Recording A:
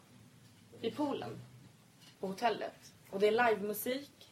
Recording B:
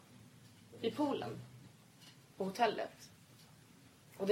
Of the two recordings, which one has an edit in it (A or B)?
A